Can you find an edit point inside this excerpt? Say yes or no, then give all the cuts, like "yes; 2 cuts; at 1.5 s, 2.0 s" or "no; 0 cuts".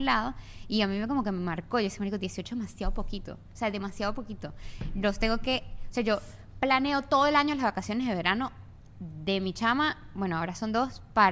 no; 0 cuts